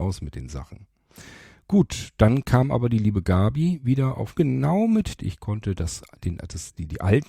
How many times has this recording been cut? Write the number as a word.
two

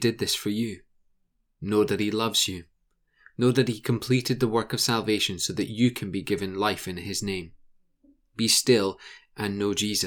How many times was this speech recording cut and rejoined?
zero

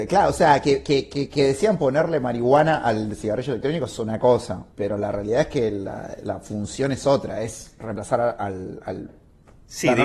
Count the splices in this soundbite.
one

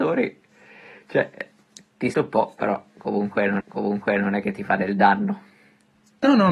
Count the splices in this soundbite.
two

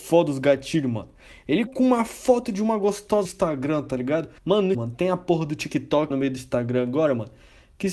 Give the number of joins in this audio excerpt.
five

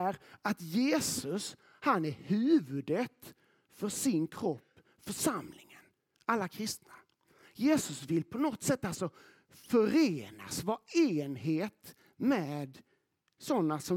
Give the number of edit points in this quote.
zero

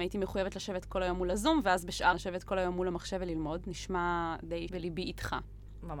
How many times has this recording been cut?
two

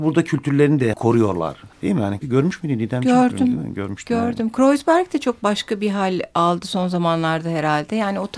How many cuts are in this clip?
three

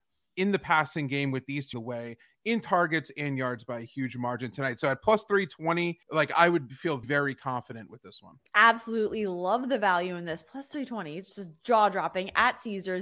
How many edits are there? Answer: four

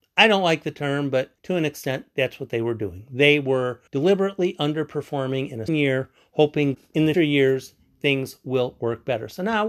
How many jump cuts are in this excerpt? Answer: five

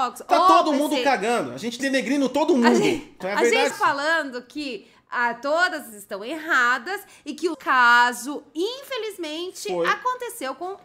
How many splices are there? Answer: five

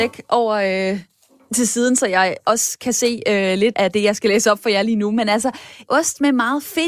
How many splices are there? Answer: two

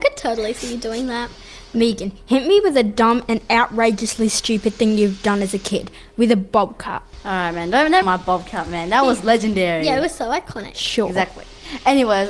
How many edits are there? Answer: one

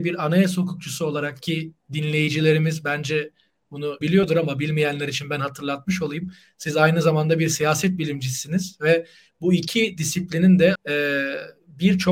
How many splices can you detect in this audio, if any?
two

